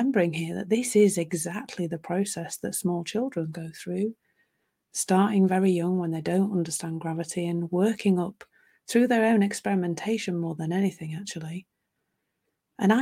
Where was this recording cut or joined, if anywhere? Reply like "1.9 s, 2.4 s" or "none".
none